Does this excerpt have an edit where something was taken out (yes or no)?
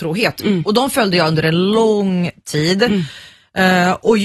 no